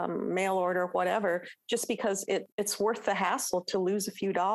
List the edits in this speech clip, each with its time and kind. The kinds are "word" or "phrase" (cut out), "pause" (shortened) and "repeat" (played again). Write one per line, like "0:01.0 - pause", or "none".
0:02.5 - pause